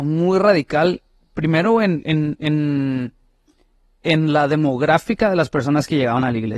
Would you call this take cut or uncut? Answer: uncut